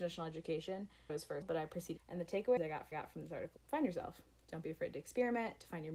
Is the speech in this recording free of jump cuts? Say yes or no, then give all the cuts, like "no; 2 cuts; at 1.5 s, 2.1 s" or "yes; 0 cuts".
no; 6 cuts; at 1.1 s, 1.4 s, 2.0 s, 2.6 s, 2.9 s, 3.6 s